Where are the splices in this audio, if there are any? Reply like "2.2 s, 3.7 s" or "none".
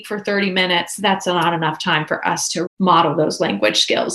2.7 s